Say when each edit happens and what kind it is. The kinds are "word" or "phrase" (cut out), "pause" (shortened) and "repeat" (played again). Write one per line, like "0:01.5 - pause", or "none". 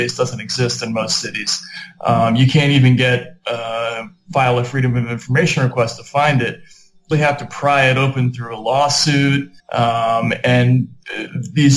0:07.1 - word
0:09.6 - pause